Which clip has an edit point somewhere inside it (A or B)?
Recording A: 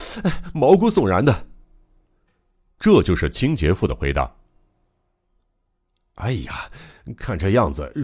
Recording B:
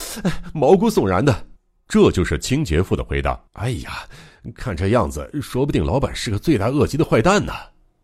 B